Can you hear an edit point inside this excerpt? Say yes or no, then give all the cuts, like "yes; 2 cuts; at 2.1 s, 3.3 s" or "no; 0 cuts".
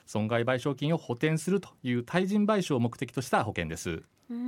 no; 0 cuts